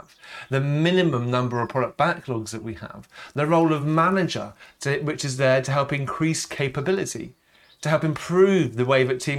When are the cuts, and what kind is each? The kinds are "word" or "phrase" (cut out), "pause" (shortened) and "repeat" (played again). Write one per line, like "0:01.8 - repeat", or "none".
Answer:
none